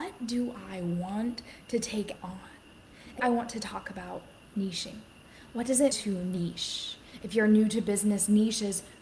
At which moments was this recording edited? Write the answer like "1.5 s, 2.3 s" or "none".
2.2 s, 3.2 s, 5.9 s